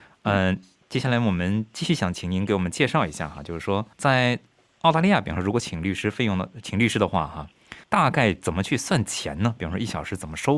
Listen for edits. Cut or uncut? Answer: cut